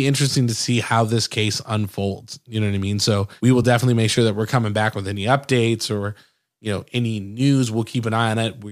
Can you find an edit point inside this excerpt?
no; 0 cuts

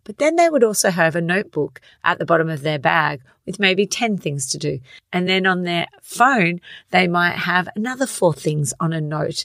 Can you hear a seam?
no; 0 cuts

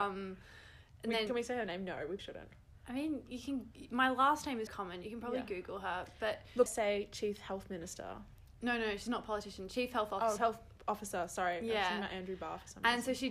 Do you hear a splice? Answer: yes; 6 cuts; at 1.3 s, 2.2 s, 3.3 s, 4.7 s, 6.7 s, 10.4 s

